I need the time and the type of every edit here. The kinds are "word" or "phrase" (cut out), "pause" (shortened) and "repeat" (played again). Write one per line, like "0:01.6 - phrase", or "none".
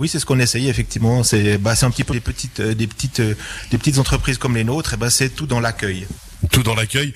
0:02.1 - word

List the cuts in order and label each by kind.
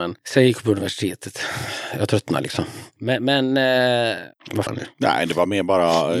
0:04.7 - phrase

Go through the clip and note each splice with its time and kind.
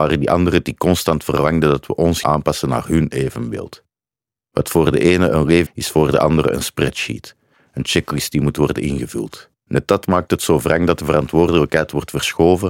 0:02.2 - word
0:05.7 - phrase
0:09.6 - pause

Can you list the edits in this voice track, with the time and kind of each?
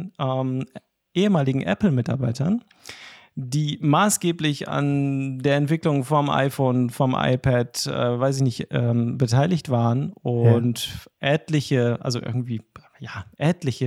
none

